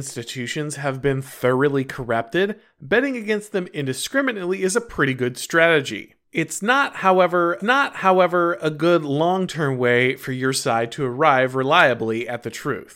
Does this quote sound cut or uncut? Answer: cut